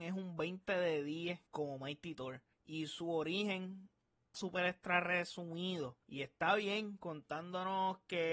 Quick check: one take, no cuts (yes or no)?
no